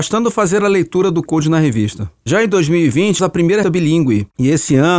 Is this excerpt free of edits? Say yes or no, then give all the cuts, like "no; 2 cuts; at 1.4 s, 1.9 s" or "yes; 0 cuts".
no; 3 cuts; at 1.3 s, 3.2 s, 3.6 s